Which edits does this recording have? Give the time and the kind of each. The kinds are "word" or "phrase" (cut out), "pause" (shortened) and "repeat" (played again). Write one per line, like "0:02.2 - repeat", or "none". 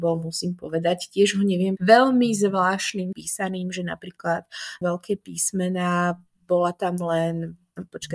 0:01.8 - phrase
0:03.1 - word
0:04.8 - phrase

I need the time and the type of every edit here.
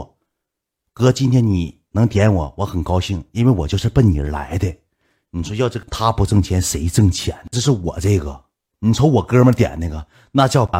none

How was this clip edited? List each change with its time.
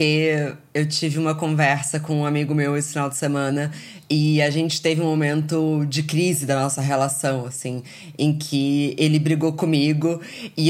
none

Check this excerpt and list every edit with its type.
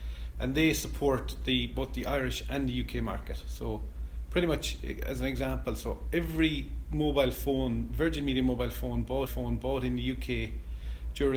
0:09.3 - repeat

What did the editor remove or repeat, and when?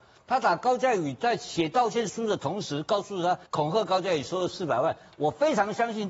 0:03.5 - pause

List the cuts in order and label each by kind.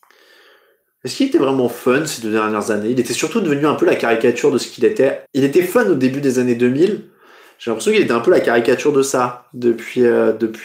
0:05.3 - pause

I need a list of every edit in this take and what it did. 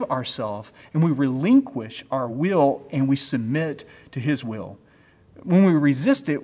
none

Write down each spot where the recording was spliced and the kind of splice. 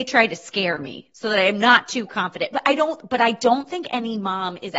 none

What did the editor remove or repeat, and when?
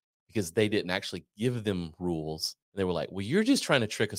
0:02.6 - pause

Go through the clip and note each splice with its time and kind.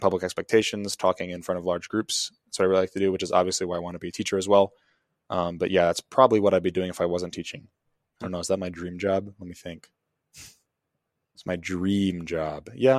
none

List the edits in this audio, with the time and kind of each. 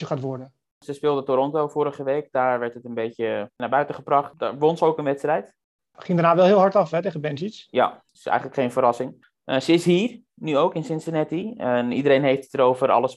none

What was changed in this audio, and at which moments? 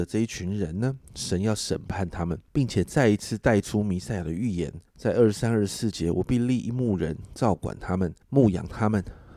0:02.5 - pause
0:04.9 - pause
0:08.2 - pause

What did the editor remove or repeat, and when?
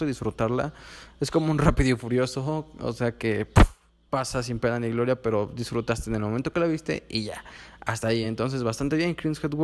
none

